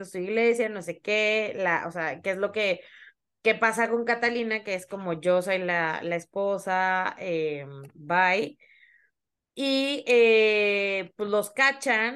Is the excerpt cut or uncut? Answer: uncut